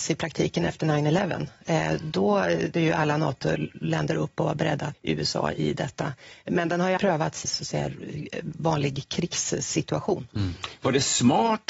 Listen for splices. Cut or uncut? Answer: cut